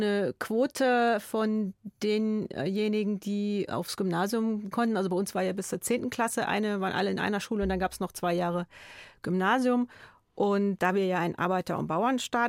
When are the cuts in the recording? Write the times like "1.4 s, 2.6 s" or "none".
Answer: 4.7 s